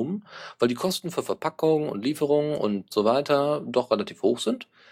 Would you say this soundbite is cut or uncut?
uncut